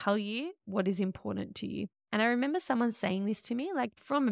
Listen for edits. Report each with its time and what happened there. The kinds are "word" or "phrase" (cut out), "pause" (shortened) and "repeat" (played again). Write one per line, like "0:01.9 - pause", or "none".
none